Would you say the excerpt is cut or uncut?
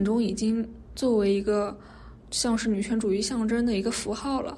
cut